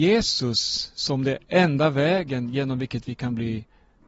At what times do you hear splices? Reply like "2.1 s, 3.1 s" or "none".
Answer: 1.5 s

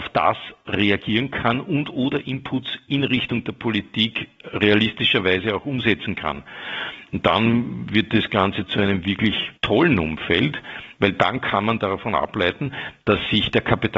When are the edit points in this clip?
9.6 s

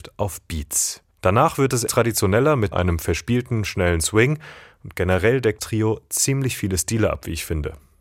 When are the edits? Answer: 1.1 s, 1.9 s, 2.7 s, 5.6 s

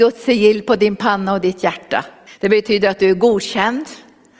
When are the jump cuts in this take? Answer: 2.3 s

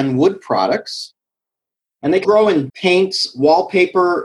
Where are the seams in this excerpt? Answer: 2.2 s, 2.7 s

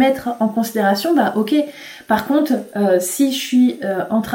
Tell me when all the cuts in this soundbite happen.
none

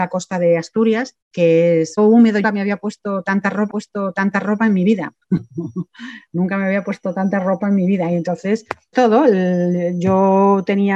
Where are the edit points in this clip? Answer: 1.2 s, 2.0 s, 2.4 s, 3.7 s, 5.2 s, 8.9 s

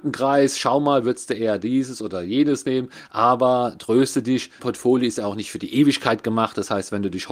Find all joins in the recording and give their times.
4.6 s

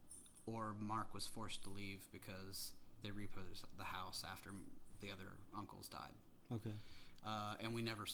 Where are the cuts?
none

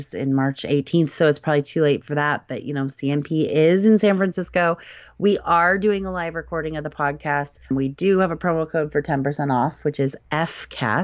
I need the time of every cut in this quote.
7.6 s

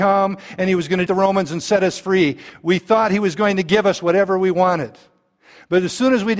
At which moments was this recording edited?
1.1 s

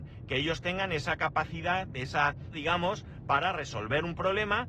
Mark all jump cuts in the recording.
2.5 s

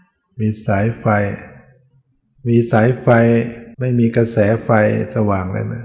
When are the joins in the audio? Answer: 3.7 s

